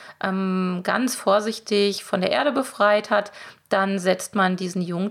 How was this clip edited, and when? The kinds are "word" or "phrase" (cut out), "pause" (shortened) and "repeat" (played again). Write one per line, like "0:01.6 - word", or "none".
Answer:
none